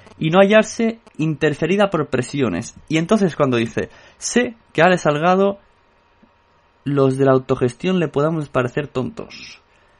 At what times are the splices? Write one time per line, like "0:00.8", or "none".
none